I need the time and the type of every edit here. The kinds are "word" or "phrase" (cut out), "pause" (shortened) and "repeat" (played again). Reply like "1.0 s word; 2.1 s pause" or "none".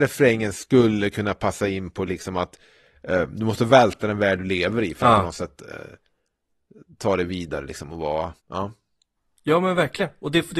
8.4 s pause